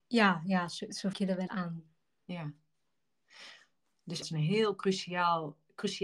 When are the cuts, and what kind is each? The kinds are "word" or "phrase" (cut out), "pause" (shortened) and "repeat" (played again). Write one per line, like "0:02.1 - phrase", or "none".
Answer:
0:01.1 - phrase
0:01.5 - word
0:04.2 - phrase